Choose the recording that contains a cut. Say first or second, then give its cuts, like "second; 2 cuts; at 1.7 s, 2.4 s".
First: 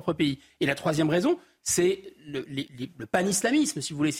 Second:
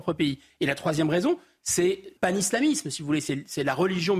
second; 1 cut; at 2.2 s